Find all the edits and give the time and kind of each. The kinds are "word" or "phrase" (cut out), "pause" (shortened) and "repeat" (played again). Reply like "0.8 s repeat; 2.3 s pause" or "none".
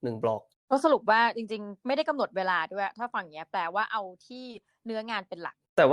none